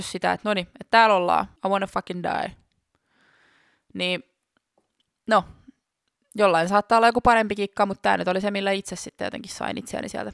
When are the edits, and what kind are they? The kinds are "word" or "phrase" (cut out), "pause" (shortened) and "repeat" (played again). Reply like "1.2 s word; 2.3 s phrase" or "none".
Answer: 1.6 s pause